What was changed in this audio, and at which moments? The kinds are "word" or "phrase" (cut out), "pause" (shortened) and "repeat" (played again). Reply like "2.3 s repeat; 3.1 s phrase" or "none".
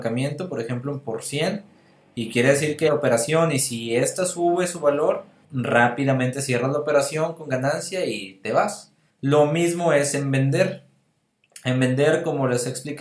2.9 s word; 5.4 s pause; 9.1 s pause